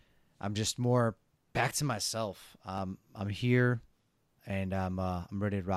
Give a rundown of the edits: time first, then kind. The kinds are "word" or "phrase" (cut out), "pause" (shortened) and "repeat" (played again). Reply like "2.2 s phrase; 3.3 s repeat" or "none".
none